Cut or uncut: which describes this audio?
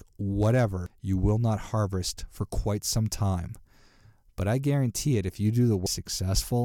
uncut